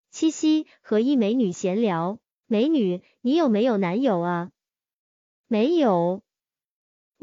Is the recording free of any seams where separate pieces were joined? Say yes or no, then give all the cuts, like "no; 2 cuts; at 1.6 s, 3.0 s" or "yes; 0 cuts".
yes; 0 cuts